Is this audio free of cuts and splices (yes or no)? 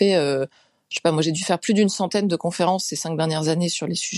yes